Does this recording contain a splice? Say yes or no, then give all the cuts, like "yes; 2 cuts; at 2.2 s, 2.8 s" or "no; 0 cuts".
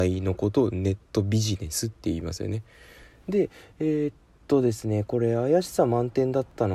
no; 0 cuts